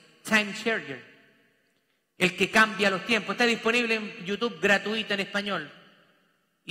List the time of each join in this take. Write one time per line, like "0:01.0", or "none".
none